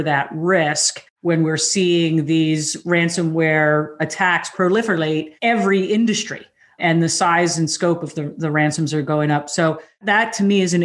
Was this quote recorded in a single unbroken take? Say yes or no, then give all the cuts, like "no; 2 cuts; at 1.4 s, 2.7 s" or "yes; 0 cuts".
yes; 0 cuts